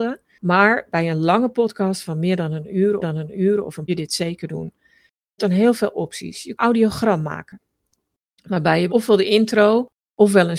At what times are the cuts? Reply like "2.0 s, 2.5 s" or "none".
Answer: 3.0 s, 3.9 s, 5.4 s, 6.5 s, 8.9 s